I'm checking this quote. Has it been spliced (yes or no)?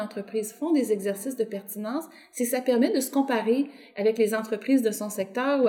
no